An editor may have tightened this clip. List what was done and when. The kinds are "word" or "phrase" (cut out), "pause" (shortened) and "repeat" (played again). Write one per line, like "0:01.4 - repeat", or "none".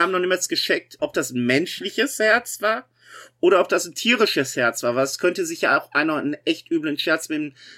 0:01.0 - word